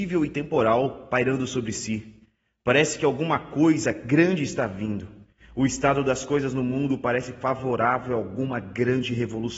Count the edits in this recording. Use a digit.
0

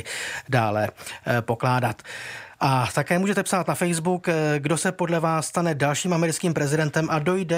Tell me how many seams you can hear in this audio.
0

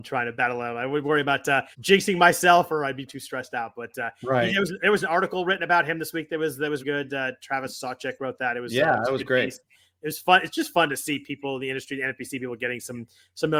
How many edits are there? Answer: 3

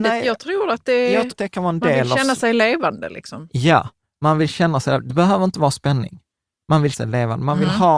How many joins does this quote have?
2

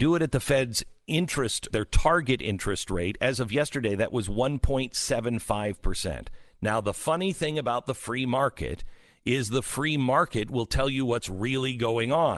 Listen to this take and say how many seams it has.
1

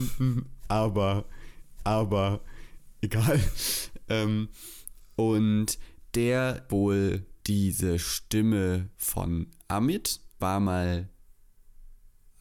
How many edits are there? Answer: 5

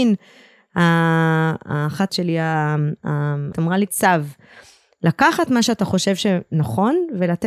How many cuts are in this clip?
3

